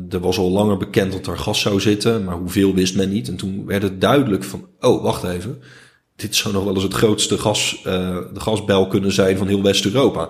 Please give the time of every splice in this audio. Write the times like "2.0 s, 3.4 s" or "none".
none